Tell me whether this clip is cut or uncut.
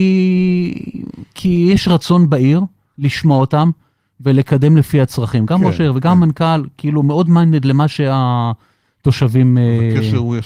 uncut